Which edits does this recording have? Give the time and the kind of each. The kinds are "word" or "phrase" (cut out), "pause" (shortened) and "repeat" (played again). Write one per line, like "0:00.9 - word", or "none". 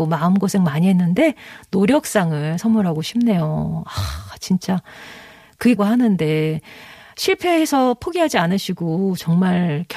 0:05.8 - phrase